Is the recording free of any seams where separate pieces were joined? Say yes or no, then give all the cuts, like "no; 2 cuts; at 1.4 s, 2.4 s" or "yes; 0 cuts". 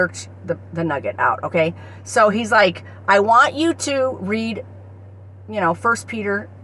yes; 0 cuts